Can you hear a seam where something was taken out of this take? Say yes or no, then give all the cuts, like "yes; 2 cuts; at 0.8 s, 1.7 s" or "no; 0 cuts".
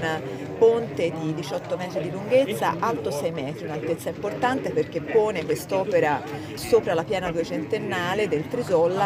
yes; 1 cut; at 6.6 s